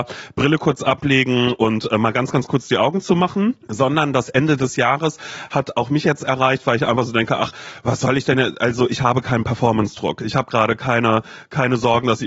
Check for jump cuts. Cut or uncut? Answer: cut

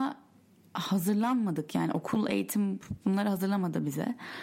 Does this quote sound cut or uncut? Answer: uncut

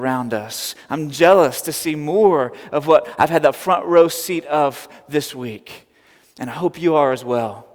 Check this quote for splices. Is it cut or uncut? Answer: uncut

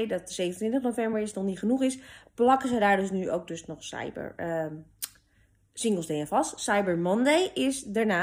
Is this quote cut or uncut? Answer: uncut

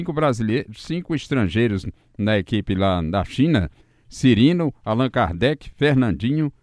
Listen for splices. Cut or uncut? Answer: uncut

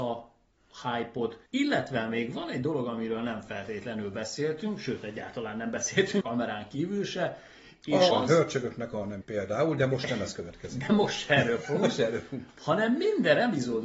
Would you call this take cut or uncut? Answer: cut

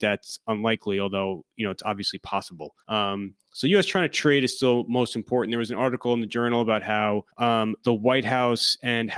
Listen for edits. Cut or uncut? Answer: cut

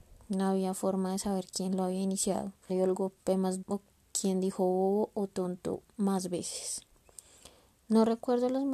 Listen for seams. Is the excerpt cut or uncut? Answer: cut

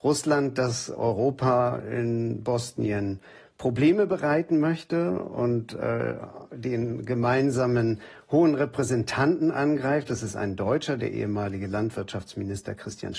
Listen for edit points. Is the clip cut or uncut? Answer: uncut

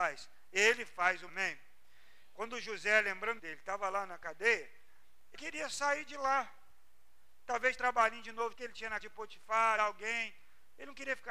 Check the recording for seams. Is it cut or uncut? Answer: cut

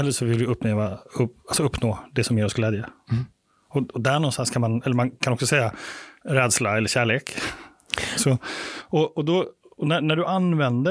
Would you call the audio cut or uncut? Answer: uncut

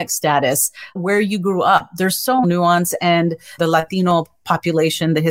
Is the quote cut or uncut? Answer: cut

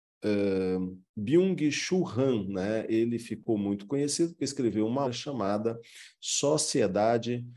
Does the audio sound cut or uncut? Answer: cut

